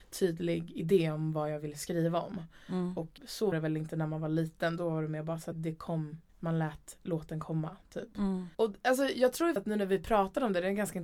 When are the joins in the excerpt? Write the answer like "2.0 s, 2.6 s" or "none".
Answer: 3.2 s, 3.5 s, 5.5 s, 6.3 s, 8.5 s, 9.6 s